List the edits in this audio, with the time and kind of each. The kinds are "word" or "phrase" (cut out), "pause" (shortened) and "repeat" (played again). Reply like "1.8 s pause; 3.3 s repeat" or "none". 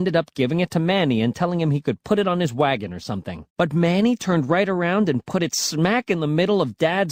3.5 s pause